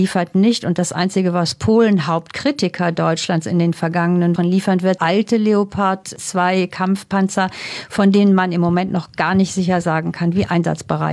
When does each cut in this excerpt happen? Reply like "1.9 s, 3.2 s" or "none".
4.4 s, 5.0 s